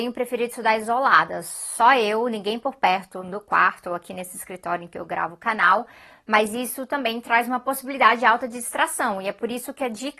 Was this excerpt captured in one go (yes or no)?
yes